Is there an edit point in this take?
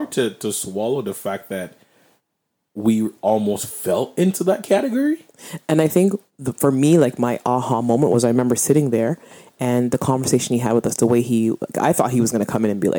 no; 0 cuts

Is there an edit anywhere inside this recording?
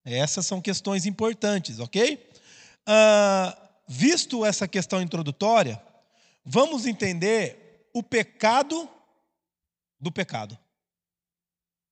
no; 0 cuts

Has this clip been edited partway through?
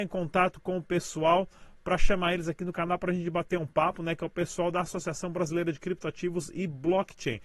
no; 0 cuts

